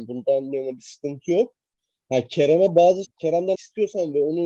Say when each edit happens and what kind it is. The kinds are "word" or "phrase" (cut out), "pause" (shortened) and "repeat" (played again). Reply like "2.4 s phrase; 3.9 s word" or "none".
3.0 s word; 3.5 s word